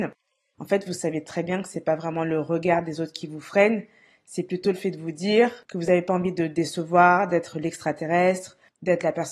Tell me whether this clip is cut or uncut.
uncut